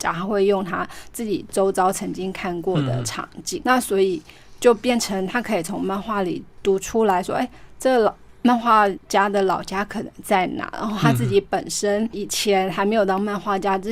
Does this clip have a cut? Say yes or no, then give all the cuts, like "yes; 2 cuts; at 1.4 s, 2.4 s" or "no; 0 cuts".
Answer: yes; 1 cut; at 3.6 s